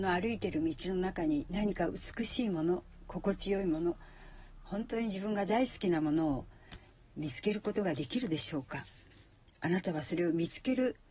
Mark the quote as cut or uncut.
uncut